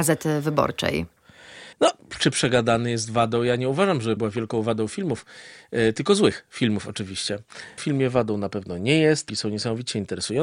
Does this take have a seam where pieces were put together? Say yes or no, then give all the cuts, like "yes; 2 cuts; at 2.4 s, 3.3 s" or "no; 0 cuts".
yes; 4 cuts; at 1.7 s, 4.2 s, 7.8 s, 9.3 s